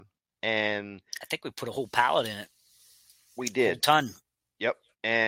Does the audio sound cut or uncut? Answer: uncut